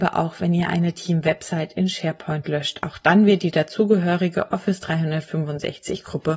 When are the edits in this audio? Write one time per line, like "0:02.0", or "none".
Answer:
none